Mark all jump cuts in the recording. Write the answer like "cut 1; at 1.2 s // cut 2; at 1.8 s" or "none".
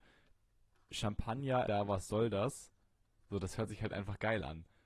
cut 1; at 1.7 s